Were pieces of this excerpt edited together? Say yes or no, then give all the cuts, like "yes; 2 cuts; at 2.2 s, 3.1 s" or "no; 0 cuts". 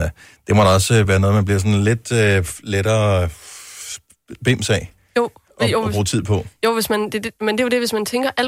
no; 0 cuts